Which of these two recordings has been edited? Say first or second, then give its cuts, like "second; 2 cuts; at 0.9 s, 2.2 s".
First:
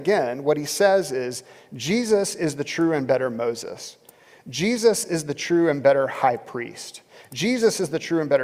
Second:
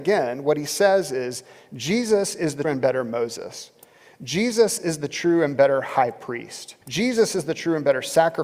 second; 2 cuts; at 2.6 s, 6.8 s